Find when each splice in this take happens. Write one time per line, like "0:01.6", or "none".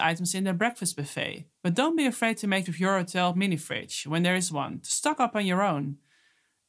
0:01.5
0:02.7